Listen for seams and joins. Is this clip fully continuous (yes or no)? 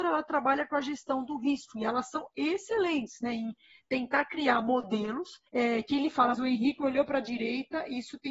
no